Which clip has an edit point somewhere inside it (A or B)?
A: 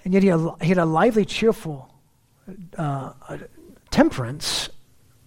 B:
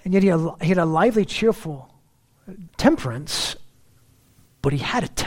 B